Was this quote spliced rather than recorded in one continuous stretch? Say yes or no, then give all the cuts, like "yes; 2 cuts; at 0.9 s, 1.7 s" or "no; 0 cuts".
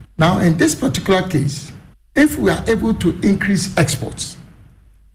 no; 0 cuts